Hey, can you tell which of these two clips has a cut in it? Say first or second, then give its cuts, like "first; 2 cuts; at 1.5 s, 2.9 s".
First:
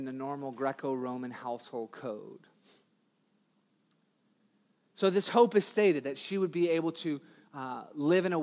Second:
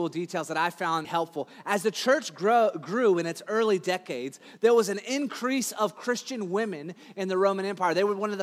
second; 1 cut; at 1.0 s